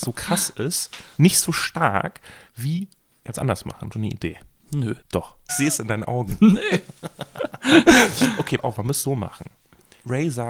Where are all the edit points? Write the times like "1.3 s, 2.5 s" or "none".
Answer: 2.5 s, 3.3 s, 3.9 s, 5.0 s, 5.5 s, 8.6 s, 9.0 s